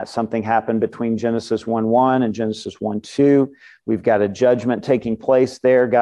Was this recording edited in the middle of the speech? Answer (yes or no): no